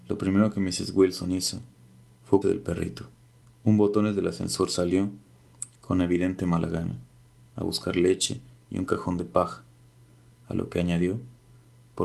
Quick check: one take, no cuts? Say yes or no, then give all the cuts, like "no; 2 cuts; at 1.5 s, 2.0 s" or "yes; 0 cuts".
no; 2 cuts; at 2.4 s, 3.4 s